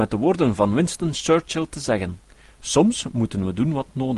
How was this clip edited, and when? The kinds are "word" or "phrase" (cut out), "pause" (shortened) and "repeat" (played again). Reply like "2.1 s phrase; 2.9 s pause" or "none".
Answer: none